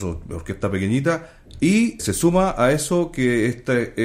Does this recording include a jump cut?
yes; 1 cut; at 2.0 s

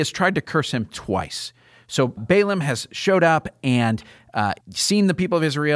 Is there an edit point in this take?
yes; 2 cuts; at 2.2 s, 4.6 s

